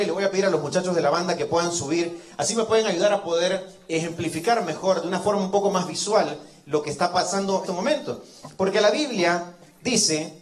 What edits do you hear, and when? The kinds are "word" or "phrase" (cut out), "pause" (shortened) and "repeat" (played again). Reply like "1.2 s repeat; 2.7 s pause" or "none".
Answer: 7.6 s phrase

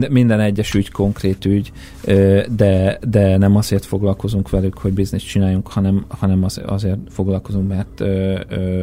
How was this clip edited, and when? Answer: none

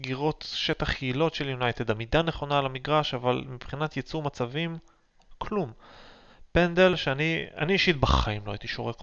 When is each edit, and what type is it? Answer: none

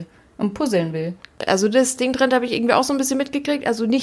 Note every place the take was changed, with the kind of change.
none

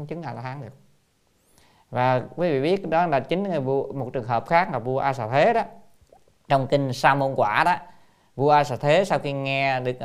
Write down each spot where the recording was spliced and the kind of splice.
none

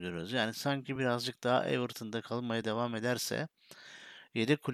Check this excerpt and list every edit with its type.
none

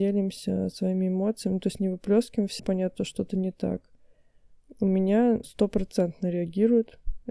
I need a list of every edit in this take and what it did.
2.6 s word; 3.0 s word; 5.4 s word

